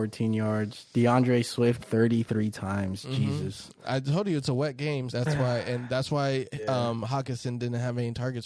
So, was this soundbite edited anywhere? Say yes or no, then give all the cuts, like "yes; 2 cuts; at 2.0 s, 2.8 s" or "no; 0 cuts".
yes; 2 cuts; at 1.8 s, 5.1 s